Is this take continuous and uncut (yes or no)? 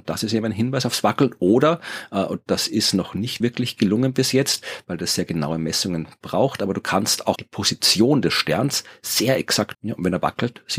no